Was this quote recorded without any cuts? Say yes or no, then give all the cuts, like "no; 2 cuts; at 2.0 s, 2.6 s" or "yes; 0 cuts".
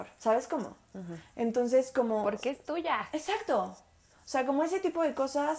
yes; 0 cuts